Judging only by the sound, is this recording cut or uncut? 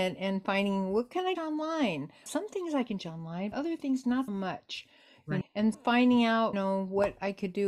cut